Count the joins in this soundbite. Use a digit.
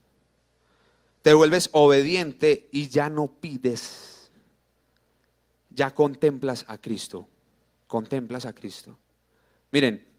0